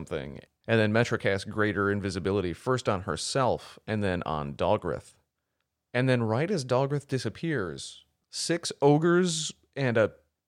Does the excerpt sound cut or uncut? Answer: uncut